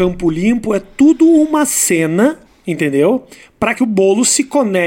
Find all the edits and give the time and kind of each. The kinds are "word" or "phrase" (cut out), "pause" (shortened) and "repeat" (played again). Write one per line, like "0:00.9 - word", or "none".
0:02.4 - pause
0:03.7 - word